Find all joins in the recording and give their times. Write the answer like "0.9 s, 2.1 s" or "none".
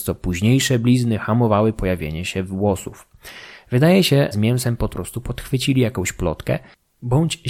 4.3 s, 4.9 s